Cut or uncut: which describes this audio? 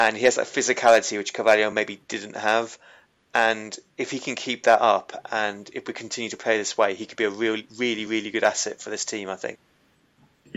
uncut